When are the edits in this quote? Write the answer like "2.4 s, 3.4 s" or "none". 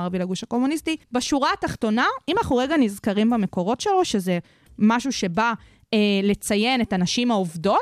1.0 s